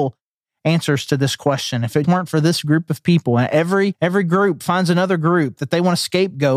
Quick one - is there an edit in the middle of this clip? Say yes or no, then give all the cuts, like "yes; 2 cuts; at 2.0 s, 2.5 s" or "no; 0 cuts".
yes; 1 cut; at 2.0 s